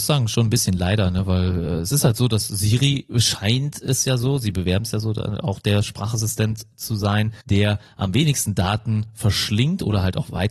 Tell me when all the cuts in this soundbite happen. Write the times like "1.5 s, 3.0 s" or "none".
7.4 s